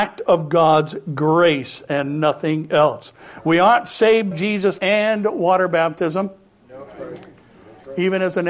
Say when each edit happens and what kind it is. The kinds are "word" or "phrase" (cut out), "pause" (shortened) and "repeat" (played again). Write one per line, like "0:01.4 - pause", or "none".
0:04.3 - word
0:04.8 - word